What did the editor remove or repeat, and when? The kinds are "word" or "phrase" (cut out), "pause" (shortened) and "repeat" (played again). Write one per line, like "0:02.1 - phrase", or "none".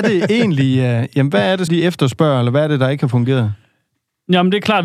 0:01.7 - word